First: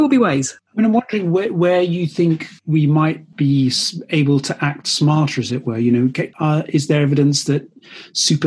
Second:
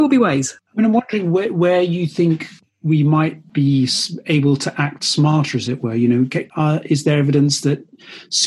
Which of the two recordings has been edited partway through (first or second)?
first